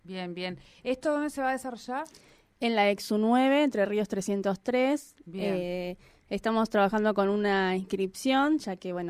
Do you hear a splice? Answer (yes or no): no